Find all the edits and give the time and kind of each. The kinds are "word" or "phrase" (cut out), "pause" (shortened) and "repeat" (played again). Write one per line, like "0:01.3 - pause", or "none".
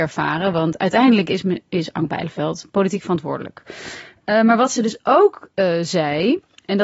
none

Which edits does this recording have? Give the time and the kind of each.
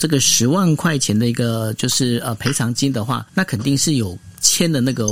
0:03.3 - pause

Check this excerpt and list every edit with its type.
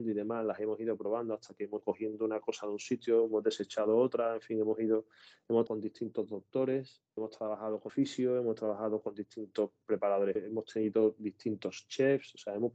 0:01.8 - word
0:05.7 - word
0:07.2 - word
0:07.9 - word
0:10.4 - word

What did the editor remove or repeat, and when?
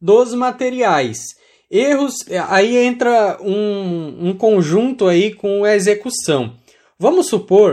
none

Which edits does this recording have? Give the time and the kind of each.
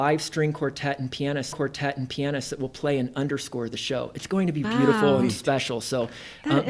0:01.5 - repeat
0:04.6 - word

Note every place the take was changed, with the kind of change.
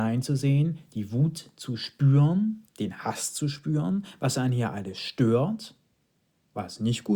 0:02.7 - pause

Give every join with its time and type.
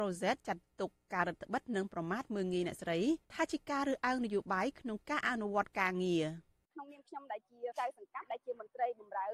0:03.2 - pause

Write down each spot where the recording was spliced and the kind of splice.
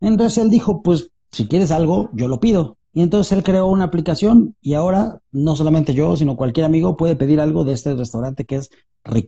0:02.8 - pause

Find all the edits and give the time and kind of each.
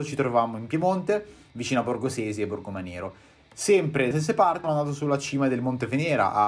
0:04.1 - word
0:04.6 - word

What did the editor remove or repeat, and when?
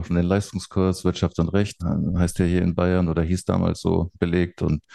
none

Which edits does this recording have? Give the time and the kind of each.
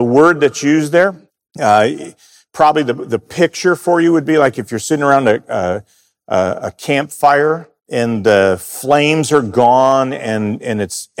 0:01.3 - pause
0:07.8 - pause

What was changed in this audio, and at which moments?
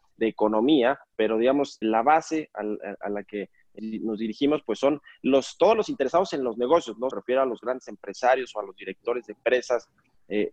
0:01.8 - word
0:03.8 - word
0:07.1 - phrase

